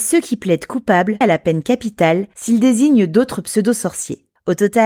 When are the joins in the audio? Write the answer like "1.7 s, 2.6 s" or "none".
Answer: 1.2 s